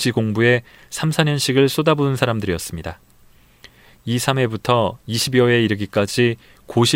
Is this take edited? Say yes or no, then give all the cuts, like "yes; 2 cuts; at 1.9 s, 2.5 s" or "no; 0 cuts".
no; 0 cuts